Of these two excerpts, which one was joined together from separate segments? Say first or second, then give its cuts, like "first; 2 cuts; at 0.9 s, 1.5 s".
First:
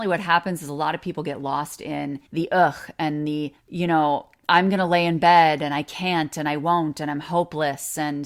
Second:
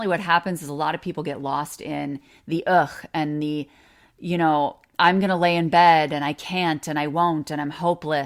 first; 2 cuts; at 2.3 s, 3.6 s